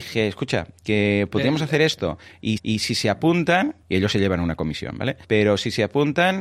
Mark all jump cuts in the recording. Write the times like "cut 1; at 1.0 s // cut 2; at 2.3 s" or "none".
cut 1; at 2.6 s // cut 2; at 3.8 s // cut 3; at 5.2 s